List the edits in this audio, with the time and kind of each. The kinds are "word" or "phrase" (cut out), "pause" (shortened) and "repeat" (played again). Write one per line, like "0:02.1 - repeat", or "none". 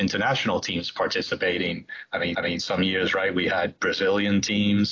0:02.3 - repeat